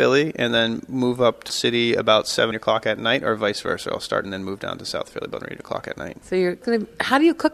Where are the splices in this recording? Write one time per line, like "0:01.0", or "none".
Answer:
0:01.5
0:02.5
0:04.2
0:05.4
0:06.2
0:06.6

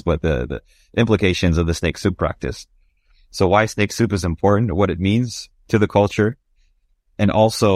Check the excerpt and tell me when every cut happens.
none

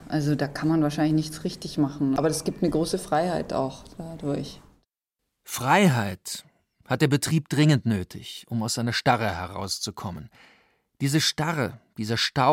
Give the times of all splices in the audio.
none

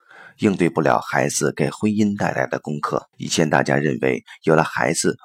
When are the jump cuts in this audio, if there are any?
0:03.1

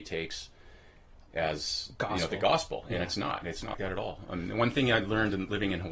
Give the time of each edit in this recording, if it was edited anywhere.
0:03.7

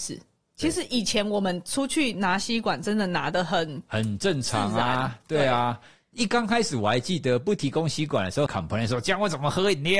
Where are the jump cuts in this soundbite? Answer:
0:08.5

